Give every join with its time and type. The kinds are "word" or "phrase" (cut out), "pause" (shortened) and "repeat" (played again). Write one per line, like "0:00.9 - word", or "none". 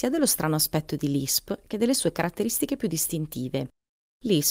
none